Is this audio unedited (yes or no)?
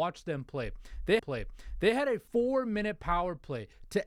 no